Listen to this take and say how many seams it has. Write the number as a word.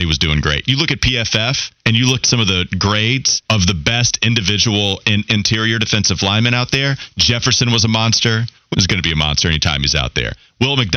four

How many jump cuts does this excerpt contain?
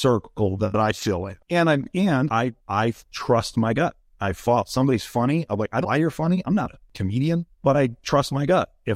four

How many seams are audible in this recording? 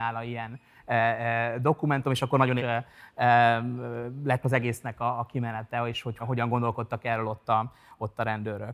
three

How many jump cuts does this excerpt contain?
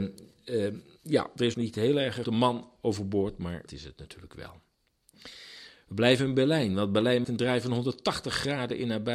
five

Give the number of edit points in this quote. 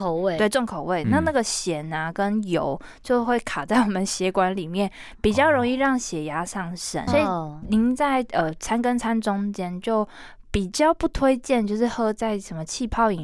one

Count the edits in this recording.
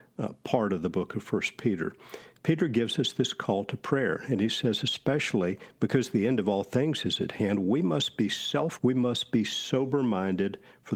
one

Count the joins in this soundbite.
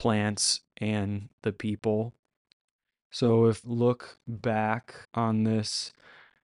two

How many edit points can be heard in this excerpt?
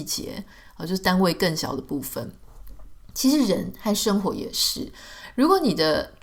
zero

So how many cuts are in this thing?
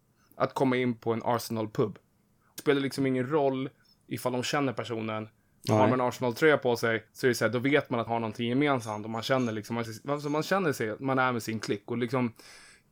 four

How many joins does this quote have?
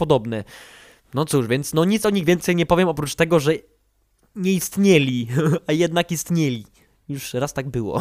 zero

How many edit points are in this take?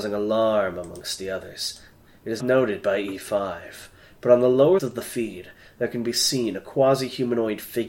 two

